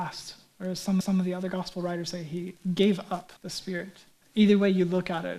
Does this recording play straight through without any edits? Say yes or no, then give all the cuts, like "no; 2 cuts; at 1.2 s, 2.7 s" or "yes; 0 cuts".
no; 3 cuts; at 1.0 s, 3.4 s, 4.2 s